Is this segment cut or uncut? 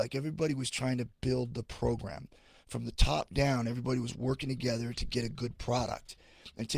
uncut